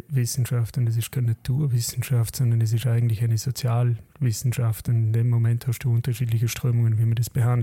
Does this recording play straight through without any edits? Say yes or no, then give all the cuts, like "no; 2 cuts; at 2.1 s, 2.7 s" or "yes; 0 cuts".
yes; 0 cuts